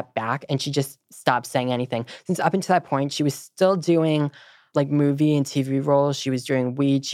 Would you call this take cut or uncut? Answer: cut